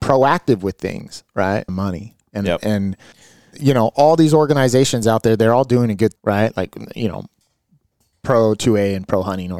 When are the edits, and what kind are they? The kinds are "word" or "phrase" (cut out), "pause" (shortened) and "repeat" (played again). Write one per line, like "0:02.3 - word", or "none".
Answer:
0:01.7 - phrase
0:03.1 - pause
0:06.2 - word